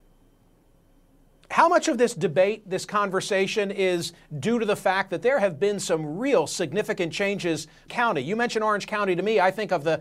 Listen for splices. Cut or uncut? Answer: cut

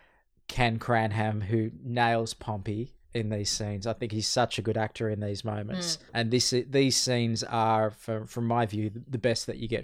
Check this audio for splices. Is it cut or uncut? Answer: cut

